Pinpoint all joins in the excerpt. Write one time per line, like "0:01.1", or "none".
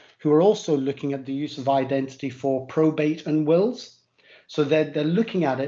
none